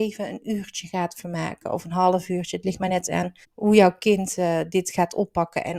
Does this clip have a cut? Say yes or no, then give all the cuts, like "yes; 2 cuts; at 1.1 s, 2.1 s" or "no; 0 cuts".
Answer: yes; 1 cut; at 3.4 s